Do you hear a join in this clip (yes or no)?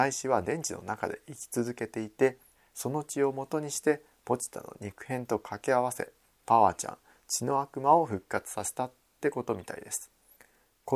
no